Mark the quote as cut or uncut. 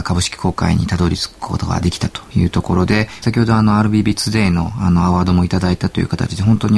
cut